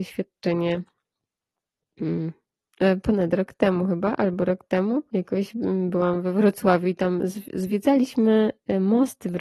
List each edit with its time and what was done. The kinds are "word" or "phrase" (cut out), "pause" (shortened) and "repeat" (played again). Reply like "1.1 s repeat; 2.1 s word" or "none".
5.1 s pause